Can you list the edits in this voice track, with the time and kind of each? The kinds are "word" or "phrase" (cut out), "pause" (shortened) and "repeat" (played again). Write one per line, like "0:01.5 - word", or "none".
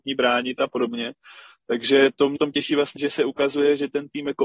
0:02.4 - word
0:03.0 - word